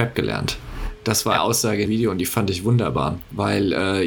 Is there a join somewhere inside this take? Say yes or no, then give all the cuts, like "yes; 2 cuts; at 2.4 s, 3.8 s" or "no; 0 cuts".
yes; 2 cuts; at 1.4 s, 1.9 s